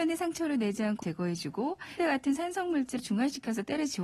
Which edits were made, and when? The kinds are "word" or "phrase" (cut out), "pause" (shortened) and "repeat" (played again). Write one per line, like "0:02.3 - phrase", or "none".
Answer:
0:01.0 - word
0:02.0 - word
0:03.0 - word